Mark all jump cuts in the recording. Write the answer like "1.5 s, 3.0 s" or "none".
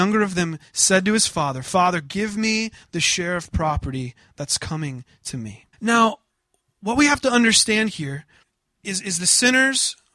5.7 s, 8.4 s